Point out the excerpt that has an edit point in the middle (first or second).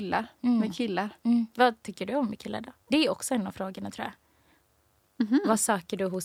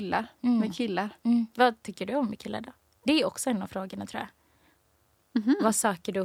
first